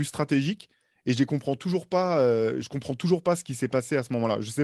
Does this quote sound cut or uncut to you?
uncut